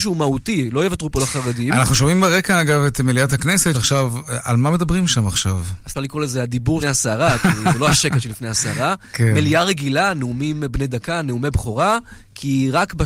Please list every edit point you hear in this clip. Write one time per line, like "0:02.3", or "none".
0:03.7
0:05.9
0:06.8